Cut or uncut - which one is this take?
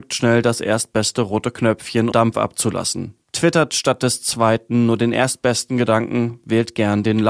cut